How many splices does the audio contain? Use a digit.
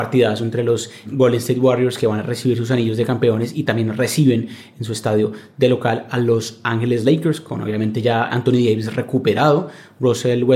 2